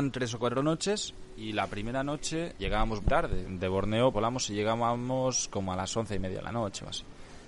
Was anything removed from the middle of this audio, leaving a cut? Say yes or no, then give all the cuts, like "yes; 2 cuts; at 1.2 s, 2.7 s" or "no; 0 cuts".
yes; 4 cuts; at 2.6 s, 3.0 s, 3.4 s, 4.1 s